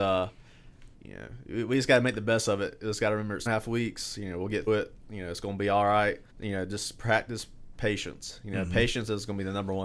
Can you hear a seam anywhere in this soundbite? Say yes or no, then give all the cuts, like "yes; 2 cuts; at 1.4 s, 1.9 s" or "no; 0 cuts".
yes; 3 cuts; at 3.5 s, 4.7 s, 6.3 s